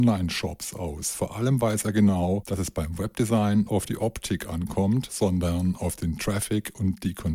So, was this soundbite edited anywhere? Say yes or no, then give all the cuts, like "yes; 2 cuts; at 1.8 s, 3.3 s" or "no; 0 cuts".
yes; 1 cut; at 3.7 s